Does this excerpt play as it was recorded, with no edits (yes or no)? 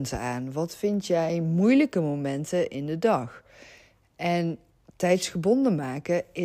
yes